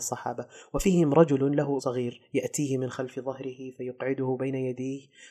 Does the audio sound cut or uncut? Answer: cut